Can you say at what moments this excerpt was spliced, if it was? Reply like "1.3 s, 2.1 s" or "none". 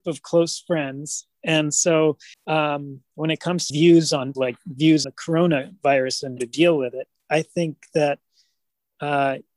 2.3 s, 3.7 s, 4.3 s, 5.0 s, 6.4 s